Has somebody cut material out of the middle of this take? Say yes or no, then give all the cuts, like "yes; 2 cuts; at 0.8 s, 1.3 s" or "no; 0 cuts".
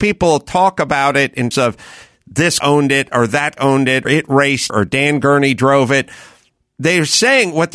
yes; 5 cuts; at 1.5 s, 2.6 s, 3.6 s, 4.0 s, 4.7 s